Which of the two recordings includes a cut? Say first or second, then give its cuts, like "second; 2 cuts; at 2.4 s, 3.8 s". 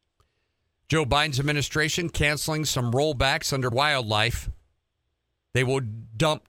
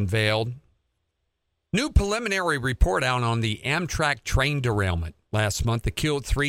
first; 1 cut; at 3.7 s